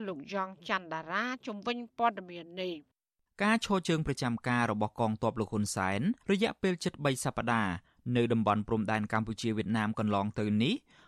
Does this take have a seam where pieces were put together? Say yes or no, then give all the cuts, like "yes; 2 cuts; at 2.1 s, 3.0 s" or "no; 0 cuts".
yes; 1 cut; at 6.2 s